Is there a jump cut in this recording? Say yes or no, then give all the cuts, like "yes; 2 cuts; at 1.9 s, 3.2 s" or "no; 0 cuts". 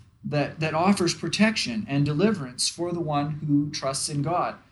no; 0 cuts